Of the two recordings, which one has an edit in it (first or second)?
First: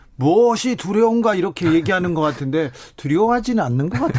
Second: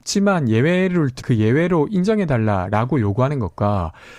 second